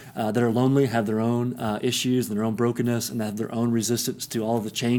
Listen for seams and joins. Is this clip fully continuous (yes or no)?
yes